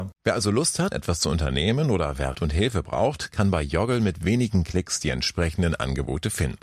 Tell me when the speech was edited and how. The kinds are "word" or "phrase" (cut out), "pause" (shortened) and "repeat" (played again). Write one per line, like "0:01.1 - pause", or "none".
0:00.9 - word
0:02.3 - word